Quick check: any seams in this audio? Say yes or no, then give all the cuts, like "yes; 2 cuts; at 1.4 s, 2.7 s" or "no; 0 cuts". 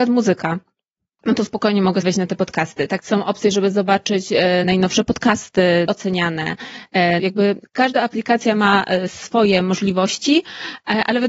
yes; 6 cuts; at 2.0 s, 3.0 s, 4.6 s, 5.9 s, 7.2 s, 7.7 s